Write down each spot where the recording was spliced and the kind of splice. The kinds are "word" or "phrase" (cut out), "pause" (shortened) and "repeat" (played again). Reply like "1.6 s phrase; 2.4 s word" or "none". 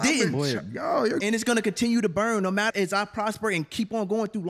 1.2 s word; 2.7 s word